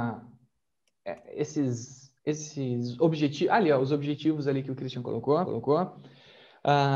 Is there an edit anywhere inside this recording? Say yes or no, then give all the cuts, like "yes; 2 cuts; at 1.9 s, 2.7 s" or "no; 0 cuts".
yes; 2 cuts; at 2.2 s, 5.4 s